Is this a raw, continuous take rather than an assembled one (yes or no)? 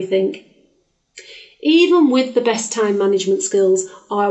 yes